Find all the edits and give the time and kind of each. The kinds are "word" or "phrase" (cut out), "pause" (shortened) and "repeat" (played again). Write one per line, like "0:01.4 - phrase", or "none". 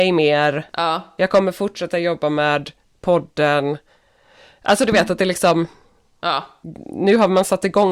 none